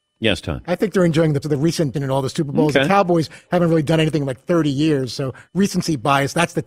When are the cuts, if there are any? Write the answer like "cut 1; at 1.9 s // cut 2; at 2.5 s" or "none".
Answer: cut 1; at 1.4 s // cut 2; at 1.9 s